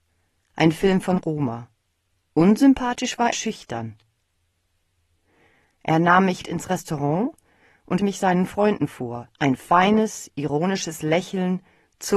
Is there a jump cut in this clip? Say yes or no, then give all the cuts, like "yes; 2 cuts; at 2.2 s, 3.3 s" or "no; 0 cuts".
yes; 5 cuts; at 2.2 s, 3.3 s, 6.4 s, 8.0 s, 9.3 s